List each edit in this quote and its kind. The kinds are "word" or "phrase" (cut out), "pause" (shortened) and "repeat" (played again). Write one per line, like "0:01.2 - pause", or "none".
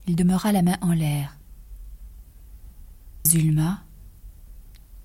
0:03.3 - word